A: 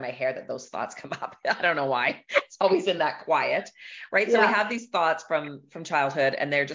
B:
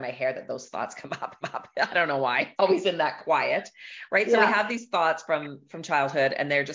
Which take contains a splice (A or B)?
B